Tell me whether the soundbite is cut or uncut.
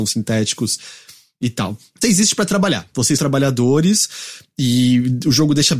cut